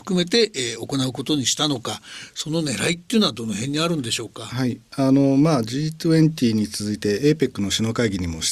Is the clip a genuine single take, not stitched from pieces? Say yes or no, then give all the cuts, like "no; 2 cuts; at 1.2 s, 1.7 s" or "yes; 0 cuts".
yes; 0 cuts